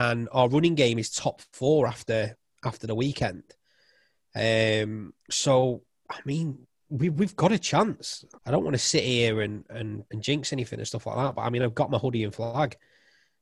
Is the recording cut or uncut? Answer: cut